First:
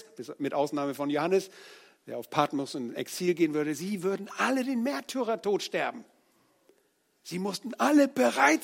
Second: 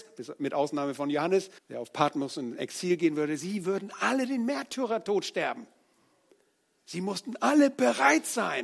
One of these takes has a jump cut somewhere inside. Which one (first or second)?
second